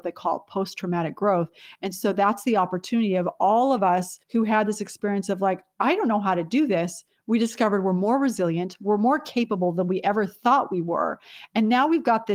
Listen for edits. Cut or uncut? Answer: cut